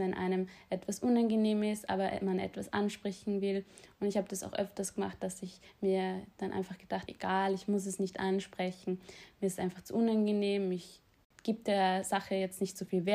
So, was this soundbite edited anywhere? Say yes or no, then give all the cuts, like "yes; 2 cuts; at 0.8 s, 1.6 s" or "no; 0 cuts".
yes; 1 cut; at 7.1 s